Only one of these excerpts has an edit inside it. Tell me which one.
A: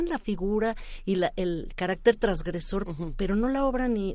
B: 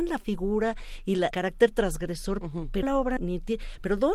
B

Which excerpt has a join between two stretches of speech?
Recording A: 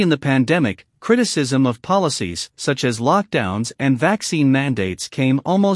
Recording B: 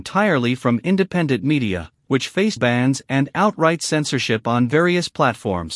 B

